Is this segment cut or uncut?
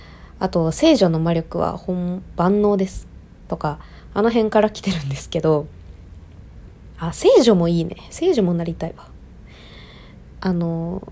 uncut